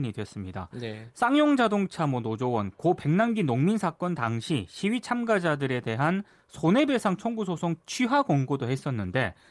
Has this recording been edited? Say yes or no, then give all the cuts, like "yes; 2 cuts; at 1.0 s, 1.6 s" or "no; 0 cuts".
no; 0 cuts